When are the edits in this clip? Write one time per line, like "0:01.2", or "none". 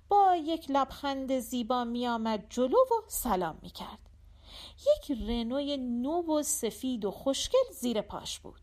none